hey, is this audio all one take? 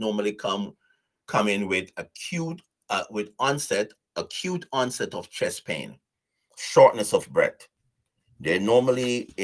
yes; 0 cuts

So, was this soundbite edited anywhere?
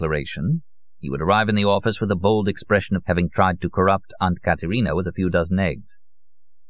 yes; 1 cut; at 3.0 s

